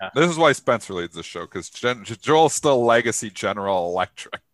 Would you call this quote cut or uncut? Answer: uncut